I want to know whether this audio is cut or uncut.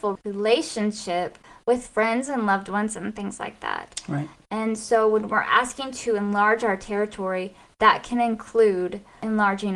uncut